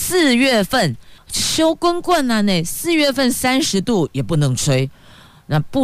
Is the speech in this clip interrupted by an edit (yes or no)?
yes